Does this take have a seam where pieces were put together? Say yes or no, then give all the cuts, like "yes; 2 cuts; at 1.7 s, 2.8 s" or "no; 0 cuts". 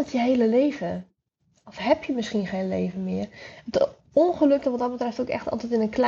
yes; 1 cut; at 4.6 s